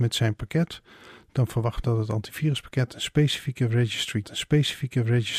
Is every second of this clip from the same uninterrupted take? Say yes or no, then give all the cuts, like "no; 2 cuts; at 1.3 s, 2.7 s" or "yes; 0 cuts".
no; 2 cuts; at 1.8 s, 4.2 s